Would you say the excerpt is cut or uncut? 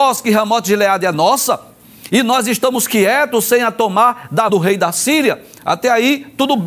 cut